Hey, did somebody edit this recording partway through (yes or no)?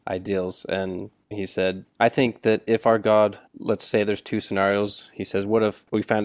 yes